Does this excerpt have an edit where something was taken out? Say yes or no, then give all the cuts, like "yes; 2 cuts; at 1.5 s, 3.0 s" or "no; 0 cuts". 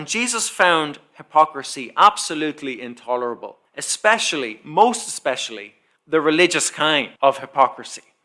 yes; 3 cuts; at 3.7 s, 6.0 s, 7.2 s